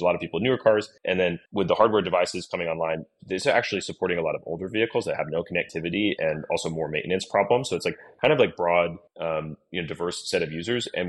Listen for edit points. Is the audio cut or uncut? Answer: cut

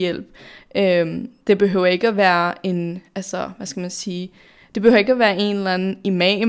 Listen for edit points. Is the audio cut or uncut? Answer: uncut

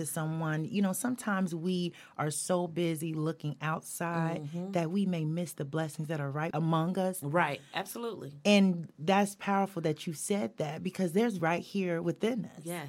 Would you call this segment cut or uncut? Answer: cut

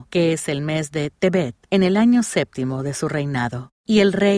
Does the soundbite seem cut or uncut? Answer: uncut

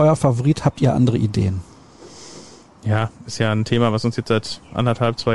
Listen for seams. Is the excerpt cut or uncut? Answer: uncut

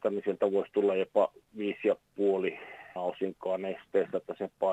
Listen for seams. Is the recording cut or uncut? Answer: cut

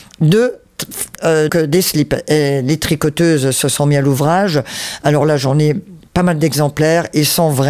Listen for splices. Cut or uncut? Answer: cut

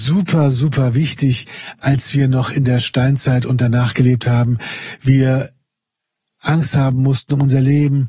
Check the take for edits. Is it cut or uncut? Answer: uncut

